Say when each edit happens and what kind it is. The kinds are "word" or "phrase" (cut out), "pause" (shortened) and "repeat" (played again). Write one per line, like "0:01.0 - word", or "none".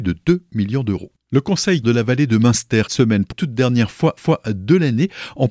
0:01.8 - word
0:02.9 - phrase
0:03.3 - word
0:04.2 - repeat